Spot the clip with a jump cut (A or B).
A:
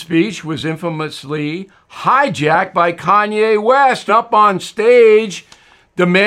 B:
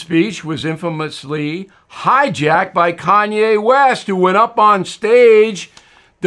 A